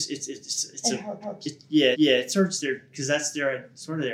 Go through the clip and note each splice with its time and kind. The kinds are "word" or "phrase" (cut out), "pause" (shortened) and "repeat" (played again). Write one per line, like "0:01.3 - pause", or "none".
0:01.2 - repeat
0:01.9 - repeat